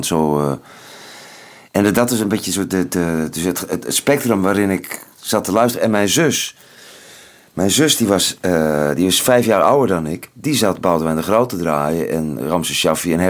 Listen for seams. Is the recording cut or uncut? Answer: uncut